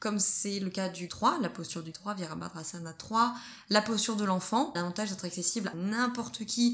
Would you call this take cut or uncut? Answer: cut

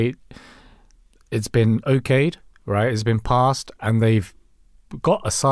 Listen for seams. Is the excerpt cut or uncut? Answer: uncut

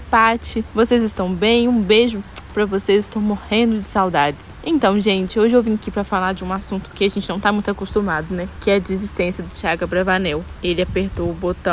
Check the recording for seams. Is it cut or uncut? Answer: uncut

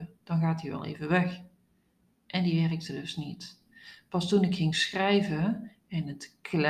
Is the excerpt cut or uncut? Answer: uncut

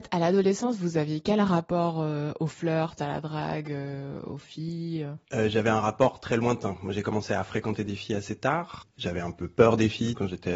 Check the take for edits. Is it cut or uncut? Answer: cut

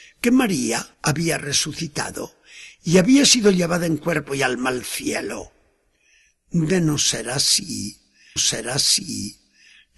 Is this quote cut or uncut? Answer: cut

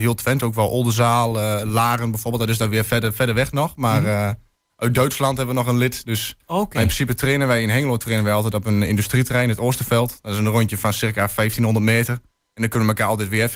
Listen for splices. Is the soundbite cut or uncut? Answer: uncut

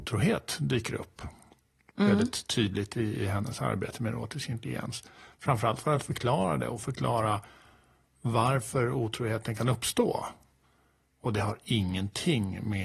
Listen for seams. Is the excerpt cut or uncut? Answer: uncut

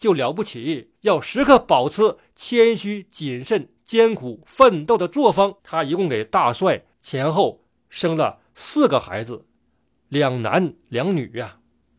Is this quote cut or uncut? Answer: cut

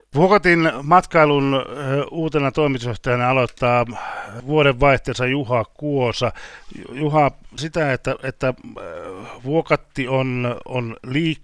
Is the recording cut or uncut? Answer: cut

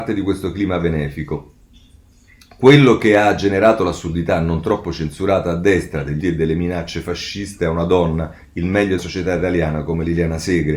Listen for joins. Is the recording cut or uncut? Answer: cut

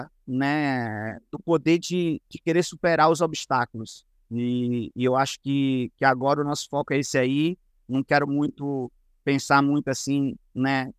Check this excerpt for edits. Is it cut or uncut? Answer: uncut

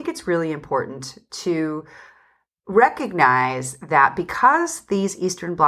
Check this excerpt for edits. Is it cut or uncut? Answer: uncut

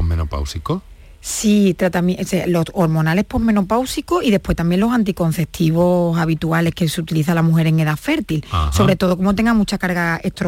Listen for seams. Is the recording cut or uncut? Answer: uncut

